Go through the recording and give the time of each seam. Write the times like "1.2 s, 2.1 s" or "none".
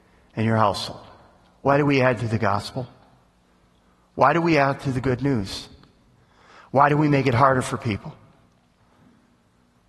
none